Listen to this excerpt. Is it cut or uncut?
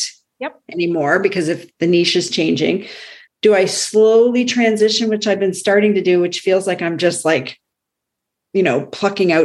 cut